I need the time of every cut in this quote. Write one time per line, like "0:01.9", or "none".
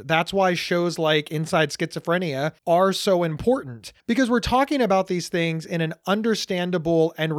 0:02.6
0:04.0